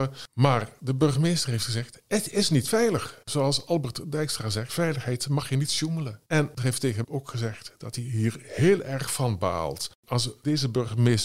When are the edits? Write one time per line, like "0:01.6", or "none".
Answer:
0:03.2
0:04.7
0:06.2
0:06.6
0:07.0
0:10.0